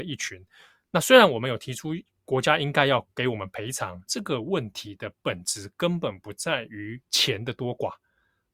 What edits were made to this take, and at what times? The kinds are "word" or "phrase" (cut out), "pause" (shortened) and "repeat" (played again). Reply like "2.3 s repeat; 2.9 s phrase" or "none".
3.1 s pause; 4.1 s phrase; 7.0 s pause